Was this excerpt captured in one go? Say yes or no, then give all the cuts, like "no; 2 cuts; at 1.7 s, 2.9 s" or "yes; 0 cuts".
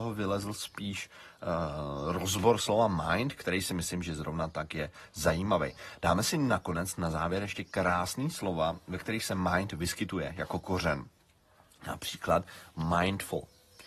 yes; 0 cuts